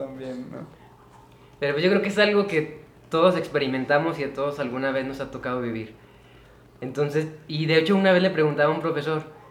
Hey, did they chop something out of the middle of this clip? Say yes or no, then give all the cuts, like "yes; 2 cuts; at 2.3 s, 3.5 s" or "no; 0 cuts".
no; 0 cuts